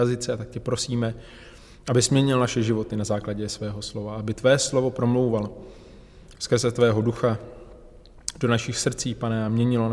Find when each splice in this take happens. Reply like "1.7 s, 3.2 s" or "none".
none